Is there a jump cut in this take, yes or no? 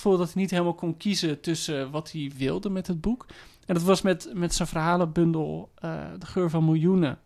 no